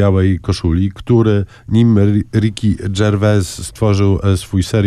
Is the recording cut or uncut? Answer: uncut